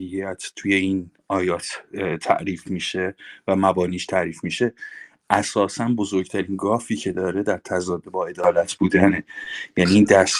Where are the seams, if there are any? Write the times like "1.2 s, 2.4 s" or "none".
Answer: 1.2 s